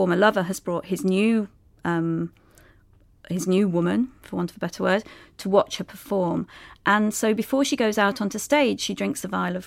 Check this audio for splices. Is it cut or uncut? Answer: uncut